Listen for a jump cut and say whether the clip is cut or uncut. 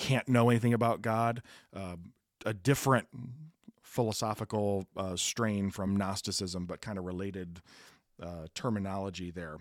uncut